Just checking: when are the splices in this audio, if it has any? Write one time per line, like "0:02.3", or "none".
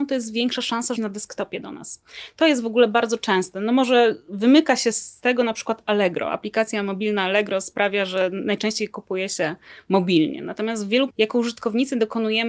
0:01.0
0:11.1